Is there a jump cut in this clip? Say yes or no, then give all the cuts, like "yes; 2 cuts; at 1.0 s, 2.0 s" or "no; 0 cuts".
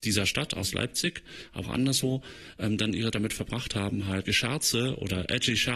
yes; 3 cuts; at 1.6 s, 3.1 s, 4.2 s